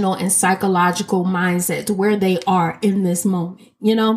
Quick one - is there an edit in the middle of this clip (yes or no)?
no